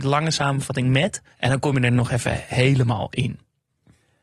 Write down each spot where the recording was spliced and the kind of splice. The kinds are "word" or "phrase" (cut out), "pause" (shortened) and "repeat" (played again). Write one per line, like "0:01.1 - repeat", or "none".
0:01.3 - pause